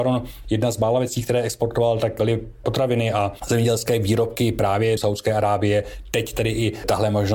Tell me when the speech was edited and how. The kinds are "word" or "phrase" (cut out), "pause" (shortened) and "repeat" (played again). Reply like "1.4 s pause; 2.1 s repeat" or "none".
5.0 s phrase